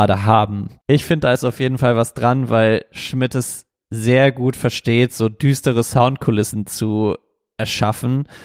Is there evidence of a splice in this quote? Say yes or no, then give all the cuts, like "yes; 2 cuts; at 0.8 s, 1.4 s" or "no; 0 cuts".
no; 0 cuts